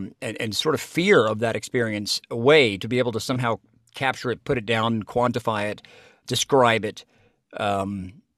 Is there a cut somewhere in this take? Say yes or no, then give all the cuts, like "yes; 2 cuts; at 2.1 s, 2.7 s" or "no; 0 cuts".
yes; 1 cut; at 6.2 s